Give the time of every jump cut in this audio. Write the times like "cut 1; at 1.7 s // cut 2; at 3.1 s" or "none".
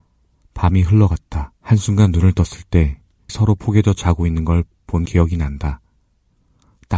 cut 1; at 1.6 s // cut 2; at 3.3 s // cut 3; at 5.1 s